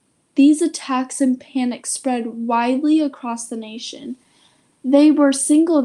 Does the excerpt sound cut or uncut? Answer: uncut